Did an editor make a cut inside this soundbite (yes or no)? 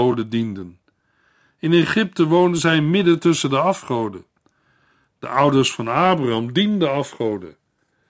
no